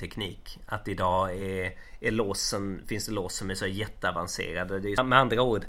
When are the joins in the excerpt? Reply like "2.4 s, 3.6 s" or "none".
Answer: none